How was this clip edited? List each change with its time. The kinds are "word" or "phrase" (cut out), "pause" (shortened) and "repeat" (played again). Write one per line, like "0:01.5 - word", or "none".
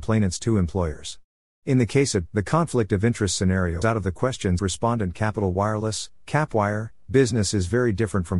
0:02.3 - word
0:03.8 - word
0:04.6 - word